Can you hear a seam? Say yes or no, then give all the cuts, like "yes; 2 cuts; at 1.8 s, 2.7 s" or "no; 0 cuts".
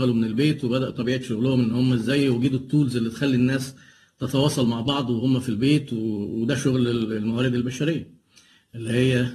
no; 0 cuts